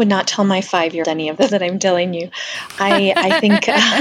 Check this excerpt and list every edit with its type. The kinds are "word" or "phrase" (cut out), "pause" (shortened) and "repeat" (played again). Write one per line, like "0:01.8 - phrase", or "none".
0:01.0 - word
0:01.5 - word